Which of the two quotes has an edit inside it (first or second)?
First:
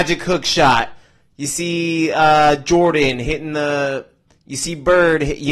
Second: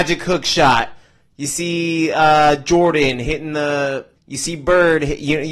second